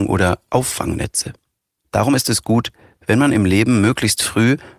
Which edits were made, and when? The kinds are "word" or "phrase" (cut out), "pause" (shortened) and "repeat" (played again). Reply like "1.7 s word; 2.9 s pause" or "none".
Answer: none